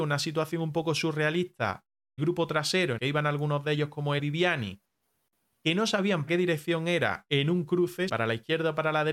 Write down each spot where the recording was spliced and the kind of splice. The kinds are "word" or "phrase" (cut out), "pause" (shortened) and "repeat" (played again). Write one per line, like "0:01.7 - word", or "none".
0:02.2 - word
0:03.0 - word
0:04.2 - word
0:06.3 - word
0:08.1 - word